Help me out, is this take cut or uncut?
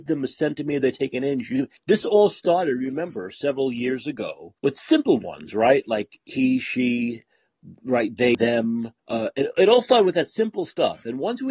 cut